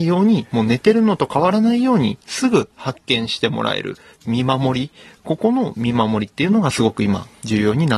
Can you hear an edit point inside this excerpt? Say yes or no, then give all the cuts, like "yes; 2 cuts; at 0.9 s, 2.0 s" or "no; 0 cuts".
no; 0 cuts